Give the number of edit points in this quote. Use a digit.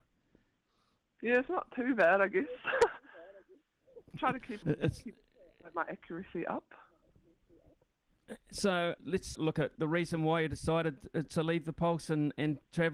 4